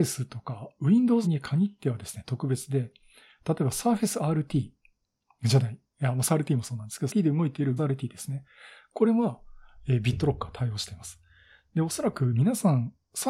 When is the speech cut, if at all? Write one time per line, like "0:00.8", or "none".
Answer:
0:01.2
0:06.3
0:07.1
0:07.8